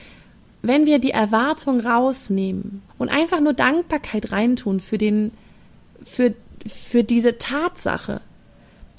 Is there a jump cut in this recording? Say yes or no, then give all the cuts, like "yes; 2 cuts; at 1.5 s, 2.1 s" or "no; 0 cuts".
yes; 1 cut; at 2.9 s